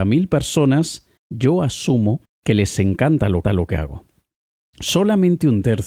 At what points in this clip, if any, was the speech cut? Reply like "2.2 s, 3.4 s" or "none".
1.2 s, 2.2 s, 3.4 s